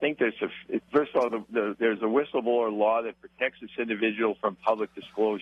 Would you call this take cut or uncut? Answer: uncut